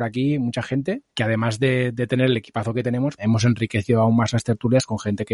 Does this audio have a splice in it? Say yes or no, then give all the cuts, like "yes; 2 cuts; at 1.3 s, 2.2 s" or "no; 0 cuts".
yes; 2 cuts; at 1.1 s, 3.2 s